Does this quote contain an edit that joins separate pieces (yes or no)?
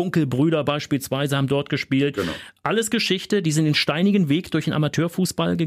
no